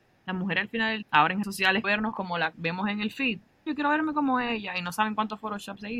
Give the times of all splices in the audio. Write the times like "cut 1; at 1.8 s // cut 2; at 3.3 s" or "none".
cut 1; at 1.0 s // cut 2; at 1.4 s // cut 3; at 1.8 s // cut 4; at 2.5 s // cut 5; at 3.7 s